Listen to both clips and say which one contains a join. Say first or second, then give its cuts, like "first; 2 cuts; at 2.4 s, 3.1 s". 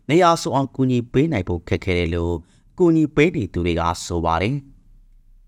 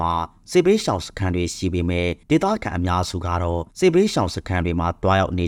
second; 2 cuts; at 2.2 s, 3.7 s